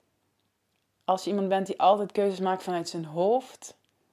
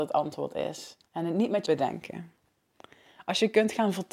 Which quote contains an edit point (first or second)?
second